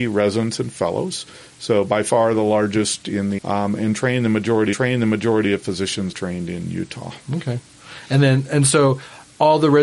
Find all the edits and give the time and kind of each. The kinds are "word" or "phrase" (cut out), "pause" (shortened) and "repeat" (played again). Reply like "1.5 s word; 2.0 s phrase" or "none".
3.4 s phrase; 4.7 s repeat; 6.1 s phrase